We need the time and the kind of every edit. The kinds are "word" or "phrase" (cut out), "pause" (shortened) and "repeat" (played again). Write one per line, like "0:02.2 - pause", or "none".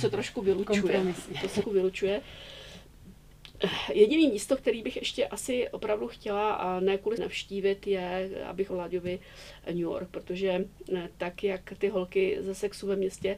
0:01.6 - word
0:07.2 - word
0:08.7 - word
0:11.1 - word

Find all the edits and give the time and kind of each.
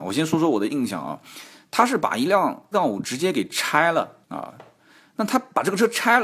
0:02.7 - word
0:04.2 - pause

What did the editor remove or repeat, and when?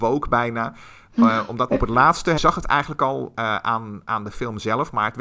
0:01.7 - word
0:02.4 - word

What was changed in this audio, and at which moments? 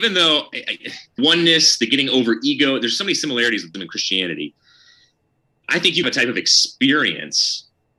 0:01.2 - word
0:03.7 - word
0:06.0 - phrase

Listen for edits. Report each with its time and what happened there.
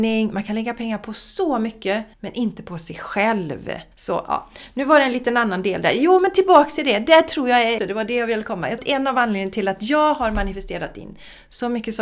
0:02.1 - pause
0:03.9 - pause
0:07.8 - word
0:08.8 - word

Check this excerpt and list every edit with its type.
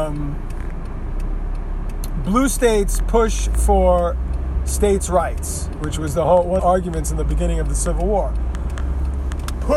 0:06.6 - phrase

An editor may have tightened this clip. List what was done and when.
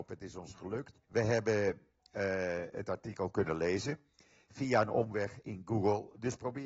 0:01.0 - pause

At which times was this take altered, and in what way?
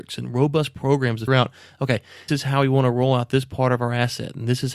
0:01.3 - word
0:02.3 - word

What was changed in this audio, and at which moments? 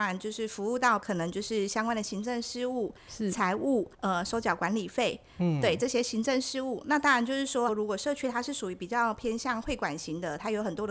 0:03.9 - pause

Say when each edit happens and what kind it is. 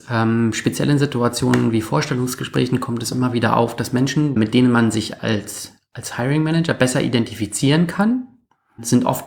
none

